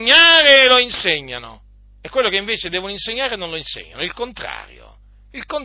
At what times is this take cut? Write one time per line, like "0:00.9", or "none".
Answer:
none